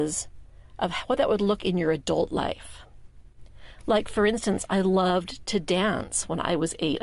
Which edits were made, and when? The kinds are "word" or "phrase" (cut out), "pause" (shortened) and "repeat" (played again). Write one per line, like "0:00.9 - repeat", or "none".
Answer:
0:01.6 - word